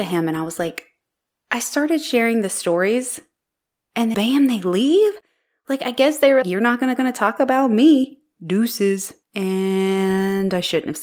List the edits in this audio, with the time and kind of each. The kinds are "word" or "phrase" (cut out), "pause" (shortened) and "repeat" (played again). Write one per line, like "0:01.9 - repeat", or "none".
0:04.1 - word
0:06.4 - word
0:07.0 - repeat
0:09.2 - pause